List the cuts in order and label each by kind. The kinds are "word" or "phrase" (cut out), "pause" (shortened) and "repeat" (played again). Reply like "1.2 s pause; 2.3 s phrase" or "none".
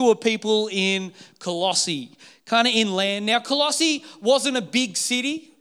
none